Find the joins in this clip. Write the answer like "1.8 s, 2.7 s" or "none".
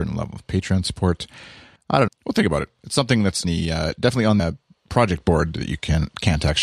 1.8 s, 2.1 s, 3.4 s, 4.4 s